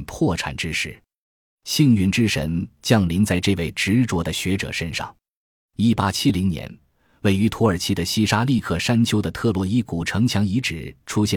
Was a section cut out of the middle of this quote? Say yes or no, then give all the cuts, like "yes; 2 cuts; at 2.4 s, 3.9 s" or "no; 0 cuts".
no; 0 cuts